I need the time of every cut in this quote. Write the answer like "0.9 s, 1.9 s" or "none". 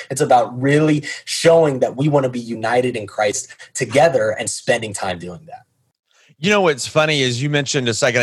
none